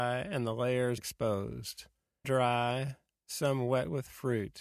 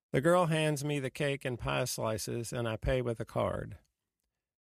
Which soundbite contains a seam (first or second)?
first